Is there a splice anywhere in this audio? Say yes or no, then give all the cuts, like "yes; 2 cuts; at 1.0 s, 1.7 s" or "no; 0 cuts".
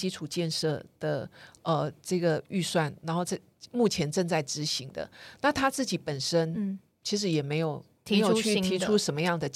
no; 0 cuts